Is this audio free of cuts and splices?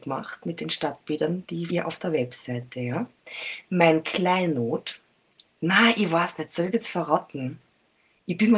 no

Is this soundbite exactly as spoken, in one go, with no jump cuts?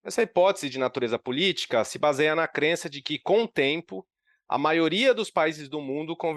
yes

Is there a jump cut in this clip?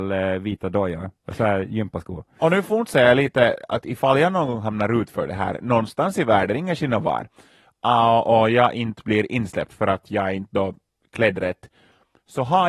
no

